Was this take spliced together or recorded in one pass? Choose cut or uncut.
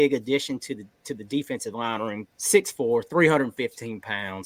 cut